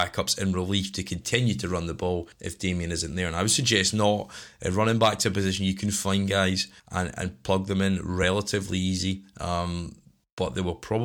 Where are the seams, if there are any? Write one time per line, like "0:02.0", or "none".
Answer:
0:02.3
0:06.8